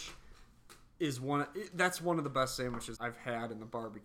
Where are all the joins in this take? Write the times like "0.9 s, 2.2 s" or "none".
3.0 s